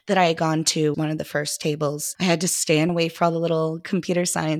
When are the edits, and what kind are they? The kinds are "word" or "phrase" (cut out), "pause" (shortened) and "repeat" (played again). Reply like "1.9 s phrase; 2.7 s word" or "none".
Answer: 0.9 s word; 2.1 s word; 2.9 s word